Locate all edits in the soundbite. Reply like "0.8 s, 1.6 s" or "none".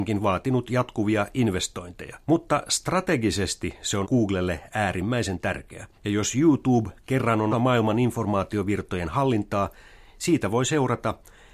2.2 s, 4.0 s, 5.9 s, 7.5 s